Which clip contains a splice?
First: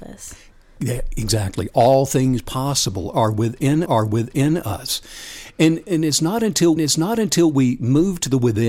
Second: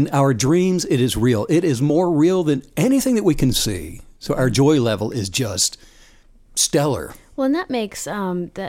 first; 2 cuts; at 3.9 s, 6.8 s

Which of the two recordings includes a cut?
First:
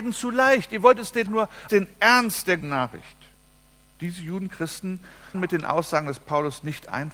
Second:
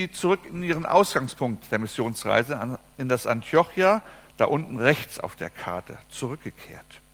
first; 5 cuts; at 1.3 s, 1.7 s, 2.6 s, 3.3 s, 5.3 s

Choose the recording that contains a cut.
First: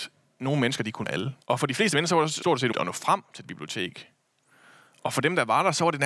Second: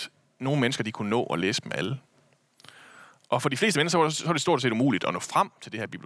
first; 5 cuts; at 1.0 s, 1.4 s, 2.4 s, 2.7 s, 3.4 s

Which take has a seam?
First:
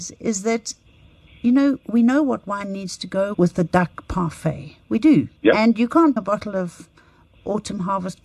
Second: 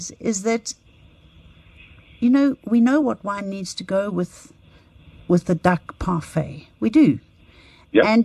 first; 4 cuts; at 1.3 s, 3.3 s, 5.4 s, 6.2 s

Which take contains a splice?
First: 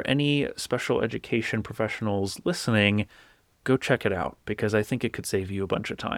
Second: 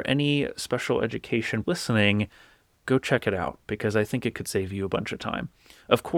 second; 1 cut; at 1.6 s

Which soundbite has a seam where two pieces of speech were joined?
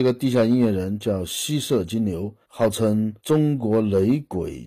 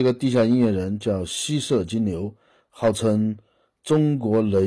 first; 2 cuts; at 2.4 s, 3.2 s

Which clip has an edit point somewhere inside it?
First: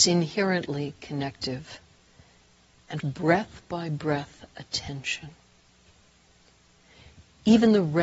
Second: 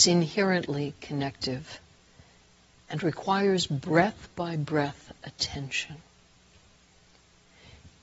first; 1 cut; at 3.0 s

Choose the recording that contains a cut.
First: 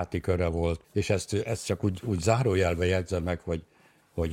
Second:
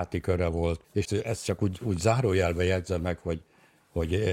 second; 1 cut; at 1.0 s

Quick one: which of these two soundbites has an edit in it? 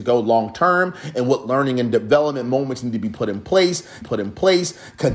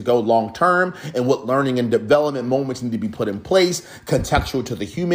first; 1 cut; at 4.0 s

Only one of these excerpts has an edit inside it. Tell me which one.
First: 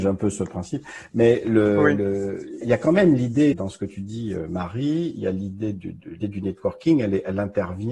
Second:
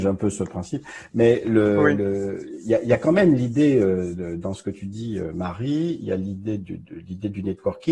first; 3 cuts; at 2.6 s, 3.5 s, 6.2 s

